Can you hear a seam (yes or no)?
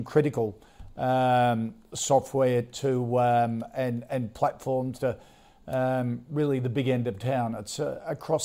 no